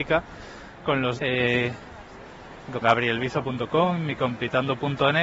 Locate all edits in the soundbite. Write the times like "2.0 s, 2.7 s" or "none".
1.2 s, 2.8 s